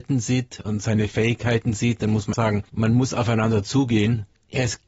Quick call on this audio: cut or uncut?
cut